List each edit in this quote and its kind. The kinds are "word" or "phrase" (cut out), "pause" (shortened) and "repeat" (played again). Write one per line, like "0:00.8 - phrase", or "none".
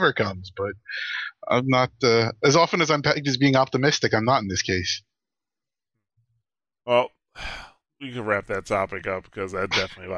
none

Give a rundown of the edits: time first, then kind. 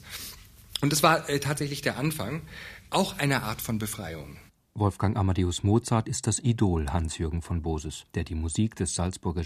0:08.1 - pause

